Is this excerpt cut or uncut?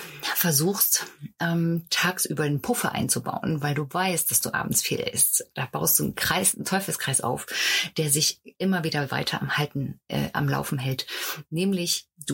uncut